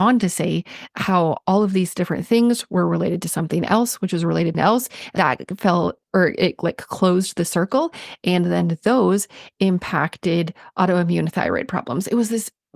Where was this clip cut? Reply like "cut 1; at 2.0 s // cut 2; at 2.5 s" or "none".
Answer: cut 1; at 4.5 s // cut 2; at 5.2 s // cut 3; at 6.0 s